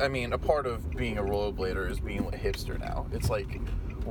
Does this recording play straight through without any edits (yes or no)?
no